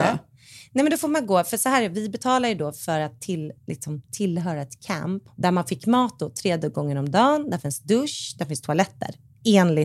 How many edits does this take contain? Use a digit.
2